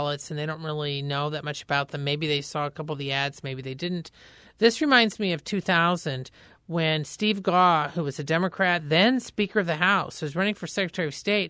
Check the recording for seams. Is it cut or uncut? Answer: uncut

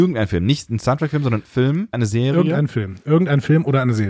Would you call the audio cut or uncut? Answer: cut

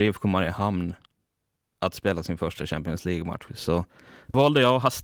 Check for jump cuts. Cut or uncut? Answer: uncut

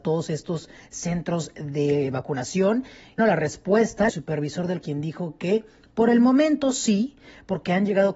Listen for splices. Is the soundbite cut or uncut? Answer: cut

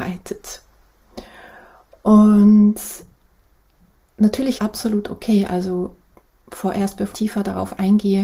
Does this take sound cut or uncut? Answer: cut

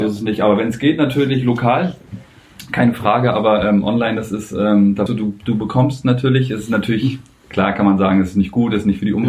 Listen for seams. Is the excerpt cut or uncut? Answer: cut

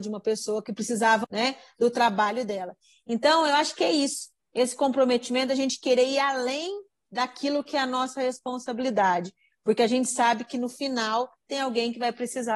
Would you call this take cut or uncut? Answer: cut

